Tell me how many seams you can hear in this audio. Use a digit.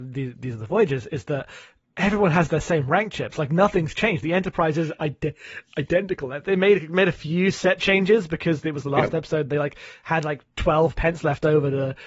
0